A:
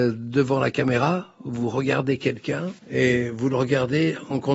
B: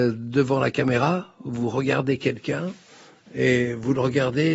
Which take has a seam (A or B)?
A